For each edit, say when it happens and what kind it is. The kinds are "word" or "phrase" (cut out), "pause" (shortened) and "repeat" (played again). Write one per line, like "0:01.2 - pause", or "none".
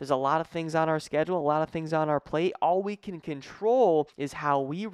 none